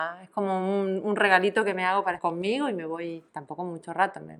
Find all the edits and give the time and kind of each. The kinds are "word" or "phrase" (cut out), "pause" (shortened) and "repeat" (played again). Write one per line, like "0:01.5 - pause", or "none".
0:02.2 - word
0:03.3 - pause